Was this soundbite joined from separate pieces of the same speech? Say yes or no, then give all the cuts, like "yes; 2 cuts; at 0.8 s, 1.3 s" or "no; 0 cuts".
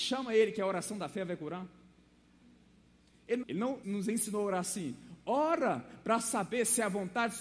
yes; 2 cuts; at 3.4 s, 3.8 s